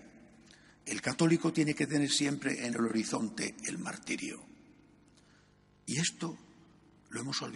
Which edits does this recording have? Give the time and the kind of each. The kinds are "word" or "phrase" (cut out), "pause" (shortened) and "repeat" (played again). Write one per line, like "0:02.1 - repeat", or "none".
none